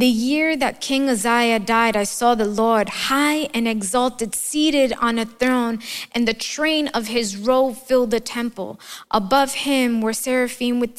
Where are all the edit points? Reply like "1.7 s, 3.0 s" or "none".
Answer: none